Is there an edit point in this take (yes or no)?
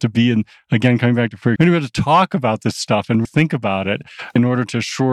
yes